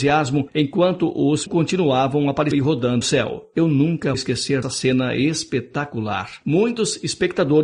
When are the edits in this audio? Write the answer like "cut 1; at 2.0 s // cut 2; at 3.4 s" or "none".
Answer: cut 1; at 1.5 s // cut 2; at 2.5 s // cut 3; at 3.0 s // cut 4; at 4.1 s // cut 5; at 4.6 s

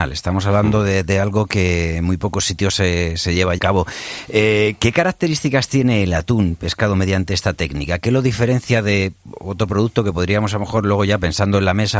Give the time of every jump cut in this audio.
cut 1; at 3.6 s

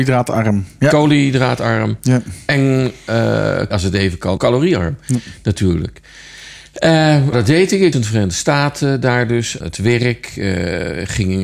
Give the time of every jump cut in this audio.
cut 1; at 3.7 s // cut 2; at 4.4 s // cut 3; at 7.3 s // cut 4; at 7.9 s // cut 5; at 9.6 s

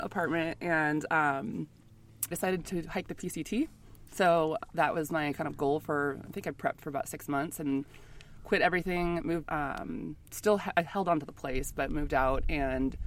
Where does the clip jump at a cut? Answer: cut 1; at 2.3 s // cut 2; at 9.4 s // cut 3; at 10.2 s

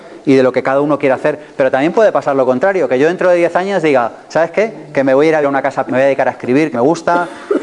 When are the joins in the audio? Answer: cut 1; at 5.4 s // cut 2; at 5.9 s // cut 3; at 6.7 s

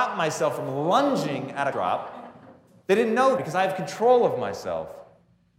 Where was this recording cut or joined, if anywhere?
cut 1; at 1.7 s // cut 2; at 3.4 s

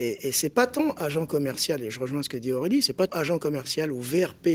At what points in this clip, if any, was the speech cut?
cut 1; at 3.1 s

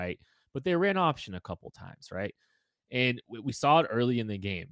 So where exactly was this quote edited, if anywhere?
none

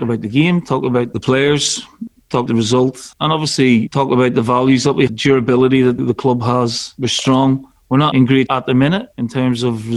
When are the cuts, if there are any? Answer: cut 1; at 2.5 s // cut 2; at 5.1 s // cut 3; at 6.0 s // cut 4; at 8.1 s // cut 5; at 8.5 s

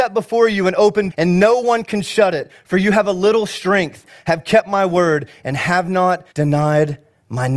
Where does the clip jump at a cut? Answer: cut 1; at 1.1 s // cut 2; at 6.3 s

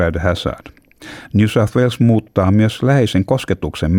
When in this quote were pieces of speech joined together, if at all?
none

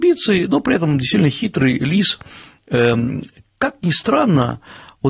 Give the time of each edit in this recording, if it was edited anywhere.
none

